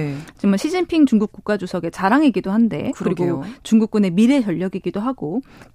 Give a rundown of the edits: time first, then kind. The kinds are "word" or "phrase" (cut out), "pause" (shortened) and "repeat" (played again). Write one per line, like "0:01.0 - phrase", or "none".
none